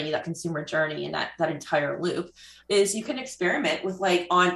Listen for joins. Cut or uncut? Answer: uncut